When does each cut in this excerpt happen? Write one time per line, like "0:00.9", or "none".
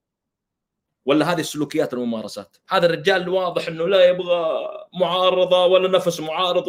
none